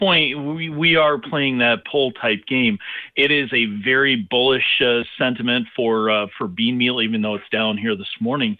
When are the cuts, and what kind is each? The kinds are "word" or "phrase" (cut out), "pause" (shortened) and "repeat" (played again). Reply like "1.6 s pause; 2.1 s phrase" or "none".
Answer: 1.8 s phrase